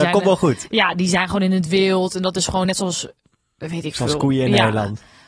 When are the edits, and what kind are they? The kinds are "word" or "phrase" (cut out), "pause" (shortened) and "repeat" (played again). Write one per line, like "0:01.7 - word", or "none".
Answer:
none